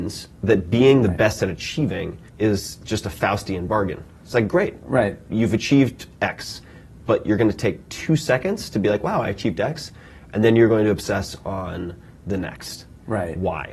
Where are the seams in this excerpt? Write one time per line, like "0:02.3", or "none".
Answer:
0:02.3